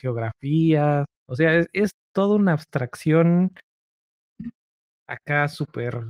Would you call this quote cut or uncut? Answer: cut